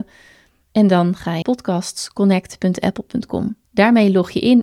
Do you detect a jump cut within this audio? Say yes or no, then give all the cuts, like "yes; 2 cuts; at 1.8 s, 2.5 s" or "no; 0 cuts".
yes; 2 cuts; at 1.4 s, 3.6 s